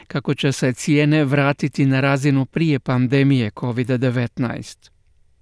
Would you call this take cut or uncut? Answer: uncut